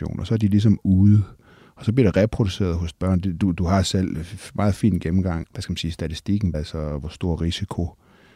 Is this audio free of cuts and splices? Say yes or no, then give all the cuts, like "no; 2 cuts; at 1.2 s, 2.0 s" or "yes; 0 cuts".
no; 3 cuts; at 2.9 s, 5.4 s, 6.5 s